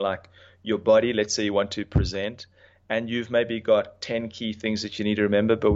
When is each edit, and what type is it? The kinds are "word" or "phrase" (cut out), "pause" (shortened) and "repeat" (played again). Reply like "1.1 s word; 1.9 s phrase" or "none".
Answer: none

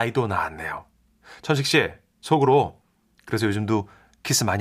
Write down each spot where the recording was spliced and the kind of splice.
none

